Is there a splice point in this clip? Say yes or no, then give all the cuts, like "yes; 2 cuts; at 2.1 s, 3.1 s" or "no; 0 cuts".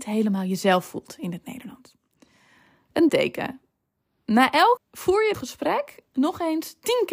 yes; 3 cuts; at 3.1 s, 4.8 s, 5.3 s